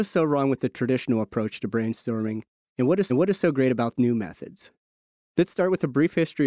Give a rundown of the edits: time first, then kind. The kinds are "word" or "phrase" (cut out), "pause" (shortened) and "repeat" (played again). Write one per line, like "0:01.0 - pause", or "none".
0:03.1 - repeat
0:03.9 - word

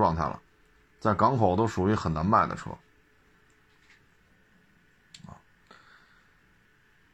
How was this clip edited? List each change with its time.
none

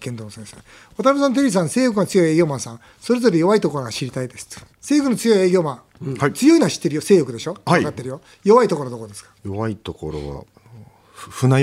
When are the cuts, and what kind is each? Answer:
0:04.7 - pause
0:09.4 - pause

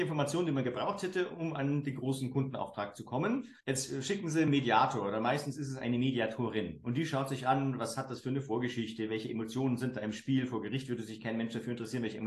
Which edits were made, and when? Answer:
0:03.6 - pause

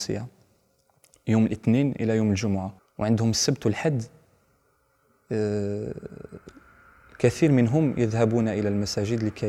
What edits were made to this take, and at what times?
0:02.8 - pause

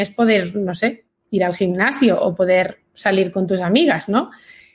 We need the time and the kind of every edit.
none

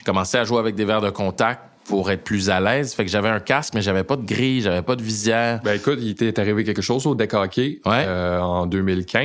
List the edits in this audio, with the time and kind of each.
none

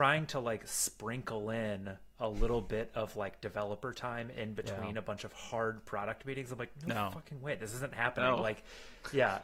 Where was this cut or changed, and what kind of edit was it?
none

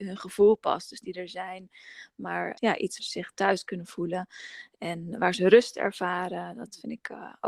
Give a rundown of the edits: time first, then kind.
0:01.0 - phrase
0:02.5 - word
0:03.0 - word

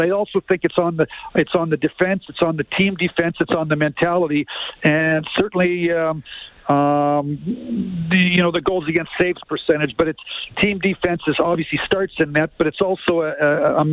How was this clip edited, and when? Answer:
none

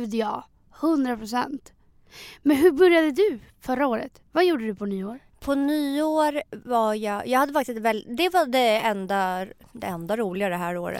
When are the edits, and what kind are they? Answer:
0:04.3 - pause
0:05.3 - pause

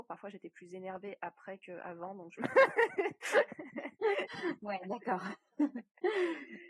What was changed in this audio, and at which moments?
none

